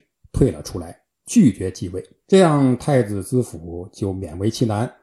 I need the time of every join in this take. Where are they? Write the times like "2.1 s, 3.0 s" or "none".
2.2 s